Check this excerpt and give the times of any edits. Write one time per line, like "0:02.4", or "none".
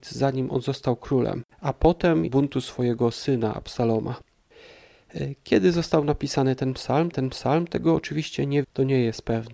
0:01.5
0:02.3
0:07.1
0:08.6